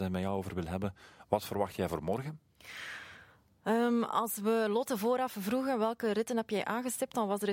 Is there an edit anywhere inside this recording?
no; 0 cuts

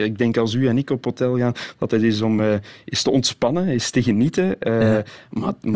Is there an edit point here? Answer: no; 0 cuts

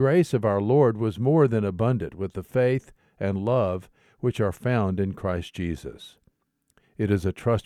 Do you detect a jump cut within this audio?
no; 0 cuts

